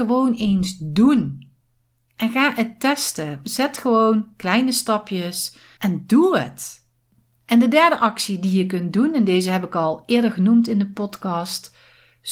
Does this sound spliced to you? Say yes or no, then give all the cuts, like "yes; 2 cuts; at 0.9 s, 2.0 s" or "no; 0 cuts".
no; 0 cuts